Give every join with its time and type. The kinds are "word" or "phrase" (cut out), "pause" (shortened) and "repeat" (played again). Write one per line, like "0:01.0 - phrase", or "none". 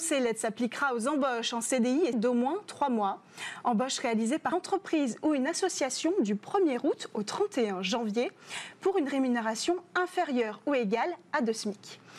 0:02.1 - word
0:04.5 - word